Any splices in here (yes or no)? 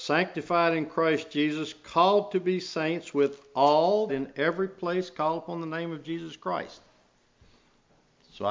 yes